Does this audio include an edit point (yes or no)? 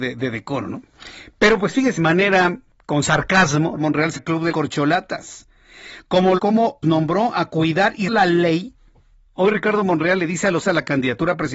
yes